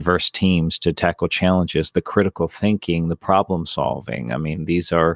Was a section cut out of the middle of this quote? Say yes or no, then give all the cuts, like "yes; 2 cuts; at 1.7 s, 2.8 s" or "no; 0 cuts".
no; 0 cuts